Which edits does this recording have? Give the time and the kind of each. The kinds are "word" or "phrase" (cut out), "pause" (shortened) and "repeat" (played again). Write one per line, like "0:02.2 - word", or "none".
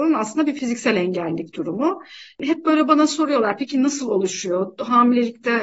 none